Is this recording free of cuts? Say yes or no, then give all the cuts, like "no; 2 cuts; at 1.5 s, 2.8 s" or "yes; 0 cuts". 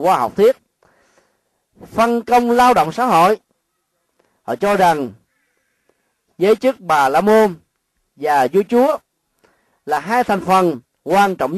yes; 0 cuts